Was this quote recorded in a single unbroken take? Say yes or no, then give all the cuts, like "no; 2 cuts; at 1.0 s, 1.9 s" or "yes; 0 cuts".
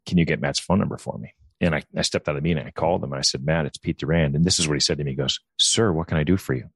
no; 1 cut; at 5.5 s